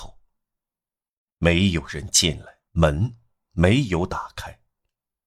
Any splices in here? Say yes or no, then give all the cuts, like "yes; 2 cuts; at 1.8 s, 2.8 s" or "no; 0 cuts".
yes; 1 cut; at 2.7 s